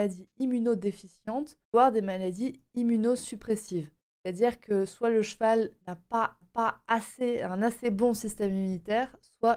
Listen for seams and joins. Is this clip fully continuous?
no; 4 cuts; at 1.6 s, 4.0 s, 5.8 s, 6.4 s

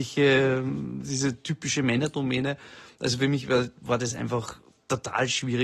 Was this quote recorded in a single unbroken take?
yes; 0 cuts

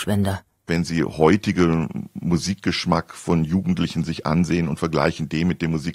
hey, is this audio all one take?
yes; 0 cuts

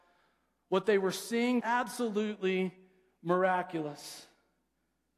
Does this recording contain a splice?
yes; 1 cut; at 1.6 s

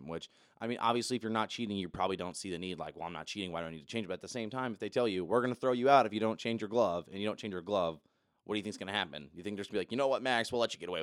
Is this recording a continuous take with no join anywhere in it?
yes; 0 cuts

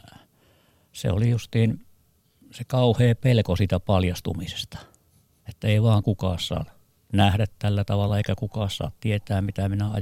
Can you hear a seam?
no; 0 cuts

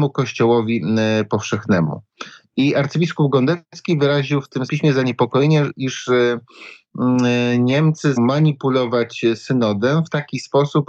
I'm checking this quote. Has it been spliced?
yes; 2 cuts; at 4.7 s, 8.2 s

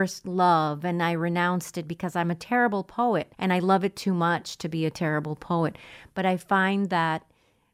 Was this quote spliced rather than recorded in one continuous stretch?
yes; 1 cut; at 3.3 s

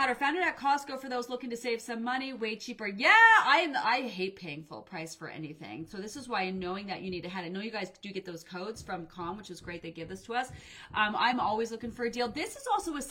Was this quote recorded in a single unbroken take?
yes; 0 cuts

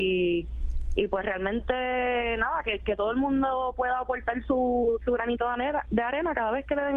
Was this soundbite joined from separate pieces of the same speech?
no; 0 cuts

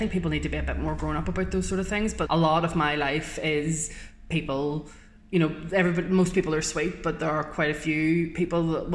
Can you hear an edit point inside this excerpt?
yes; 1 cut; at 2.3 s

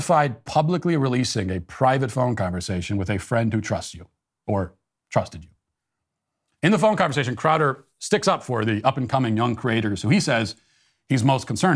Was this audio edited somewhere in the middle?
no; 0 cuts

